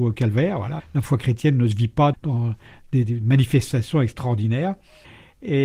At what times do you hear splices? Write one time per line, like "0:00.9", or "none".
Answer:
0:02.1